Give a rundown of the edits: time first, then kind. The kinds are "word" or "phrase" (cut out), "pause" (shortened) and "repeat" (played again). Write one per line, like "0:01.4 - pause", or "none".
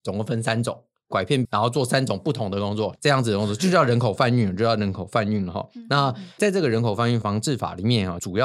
0:01.4 - word